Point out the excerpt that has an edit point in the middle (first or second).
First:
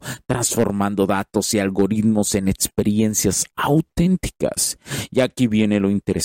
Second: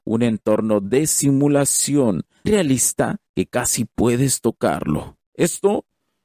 second